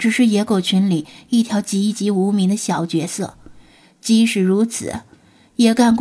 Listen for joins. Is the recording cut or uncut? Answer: uncut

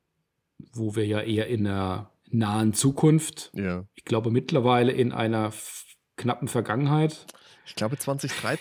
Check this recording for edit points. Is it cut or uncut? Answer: uncut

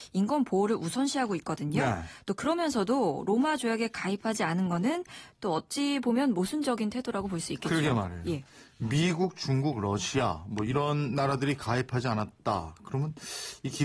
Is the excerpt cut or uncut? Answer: uncut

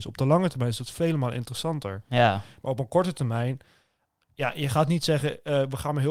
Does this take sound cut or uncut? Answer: uncut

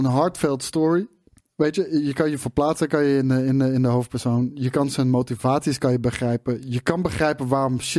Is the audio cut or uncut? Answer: uncut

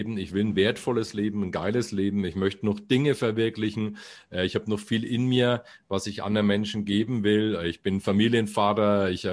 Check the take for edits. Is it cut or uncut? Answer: uncut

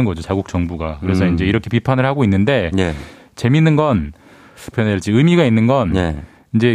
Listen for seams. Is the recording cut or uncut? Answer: cut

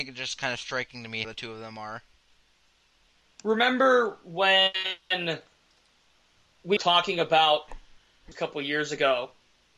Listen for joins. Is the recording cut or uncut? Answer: cut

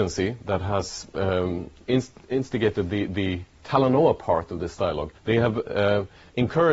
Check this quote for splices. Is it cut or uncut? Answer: cut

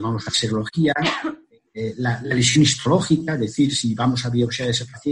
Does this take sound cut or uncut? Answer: uncut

